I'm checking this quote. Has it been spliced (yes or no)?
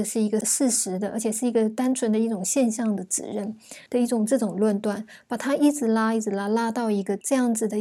yes